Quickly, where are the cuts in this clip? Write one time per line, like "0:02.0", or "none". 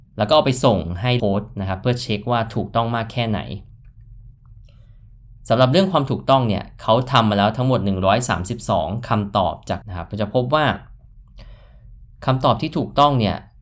0:01.2
0:09.8